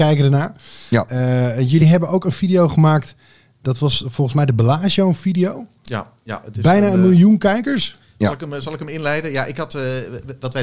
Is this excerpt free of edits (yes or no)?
yes